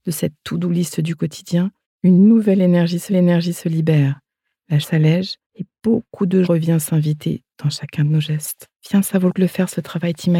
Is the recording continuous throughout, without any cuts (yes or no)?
no